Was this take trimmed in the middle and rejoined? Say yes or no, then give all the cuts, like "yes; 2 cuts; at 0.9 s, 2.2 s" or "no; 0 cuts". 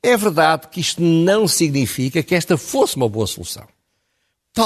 no; 0 cuts